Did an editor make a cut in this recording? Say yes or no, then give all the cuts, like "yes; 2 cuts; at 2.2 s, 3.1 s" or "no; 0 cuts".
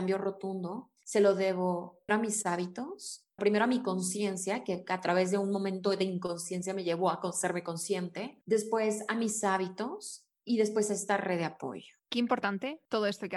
yes; 3 cuts; at 2.1 s, 3.4 s, 12.0 s